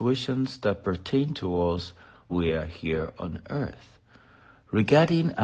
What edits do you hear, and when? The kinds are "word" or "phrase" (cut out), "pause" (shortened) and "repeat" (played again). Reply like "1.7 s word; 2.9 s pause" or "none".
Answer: 2.3 s word